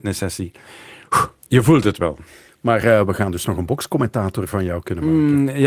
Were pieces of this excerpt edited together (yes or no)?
no